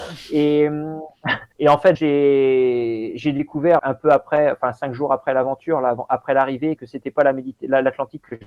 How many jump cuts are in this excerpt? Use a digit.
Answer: 4